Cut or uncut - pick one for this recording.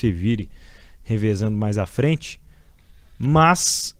uncut